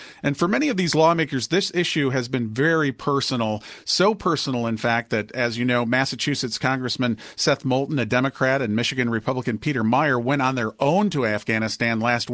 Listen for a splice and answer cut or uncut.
uncut